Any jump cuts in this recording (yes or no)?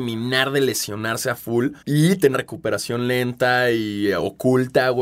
yes